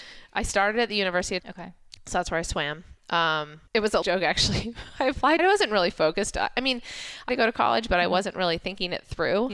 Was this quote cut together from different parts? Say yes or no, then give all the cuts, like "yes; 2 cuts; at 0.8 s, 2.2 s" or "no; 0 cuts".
yes; 5 cuts; at 1.4 s, 3.7 s, 4.0 s, 5.4 s, 7.3 s